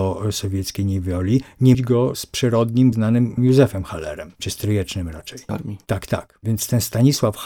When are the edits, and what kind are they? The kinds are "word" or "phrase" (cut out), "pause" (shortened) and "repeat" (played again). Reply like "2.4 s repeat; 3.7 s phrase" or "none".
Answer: 1.7 s word; 2.9 s word; 3.4 s word; 4.4 s word; 5.5 s word